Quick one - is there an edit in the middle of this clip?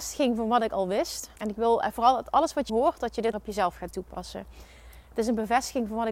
yes; 3 cuts; at 1.4 s, 2.7 s, 3.3 s

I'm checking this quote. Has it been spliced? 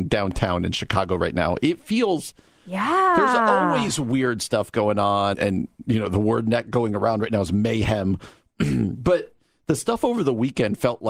yes; 1 cut; at 5.3 s

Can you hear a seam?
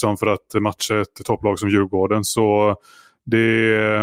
no; 0 cuts

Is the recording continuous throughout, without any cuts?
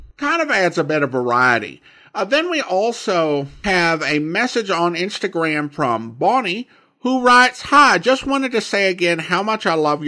yes; 0 cuts

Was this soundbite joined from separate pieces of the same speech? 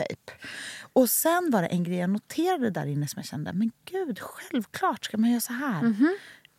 no; 0 cuts

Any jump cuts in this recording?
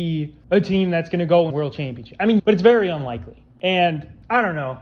yes; 2 cuts; at 1.5 s, 2.4 s

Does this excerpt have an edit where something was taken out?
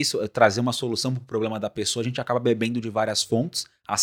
no; 0 cuts

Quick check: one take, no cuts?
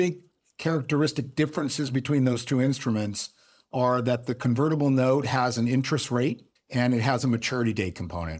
no; 1 cut; at 6.6 s

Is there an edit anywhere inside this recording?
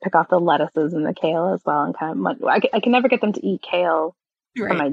no; 0 cuts

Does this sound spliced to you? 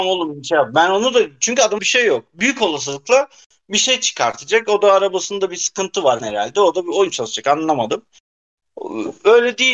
yes; 3 cuts; at 1.8 s, 6.2 s, 7.1 s

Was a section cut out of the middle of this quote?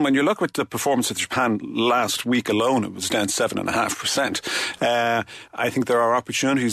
no; 0 cuts

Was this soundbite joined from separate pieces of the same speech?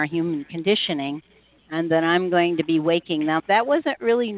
yes; 1 cut; at 3.4 s

